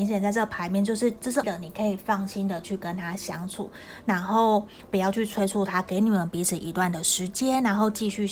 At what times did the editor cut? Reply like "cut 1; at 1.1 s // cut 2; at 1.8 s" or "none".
cut 1; at 1.4 s